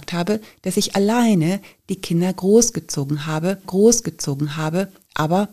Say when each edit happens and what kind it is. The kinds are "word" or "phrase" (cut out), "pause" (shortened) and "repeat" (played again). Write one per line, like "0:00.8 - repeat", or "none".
0:03.6 - repeat